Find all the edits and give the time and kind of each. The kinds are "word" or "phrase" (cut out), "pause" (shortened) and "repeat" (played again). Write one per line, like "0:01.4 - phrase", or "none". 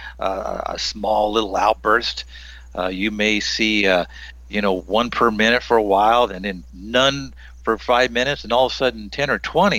none